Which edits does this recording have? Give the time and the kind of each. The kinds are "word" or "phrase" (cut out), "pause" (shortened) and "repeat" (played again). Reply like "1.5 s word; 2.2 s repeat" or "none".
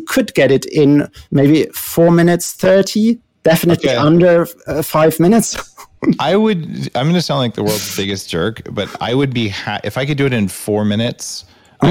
1.2 s pause